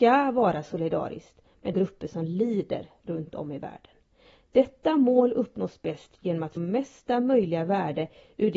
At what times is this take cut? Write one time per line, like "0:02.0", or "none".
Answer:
0:01.7
0:06.6